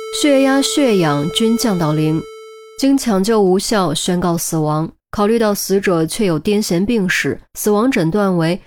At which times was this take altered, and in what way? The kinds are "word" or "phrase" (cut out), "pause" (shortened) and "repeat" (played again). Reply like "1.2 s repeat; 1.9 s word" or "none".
5.0 s pause; 7.5 s pause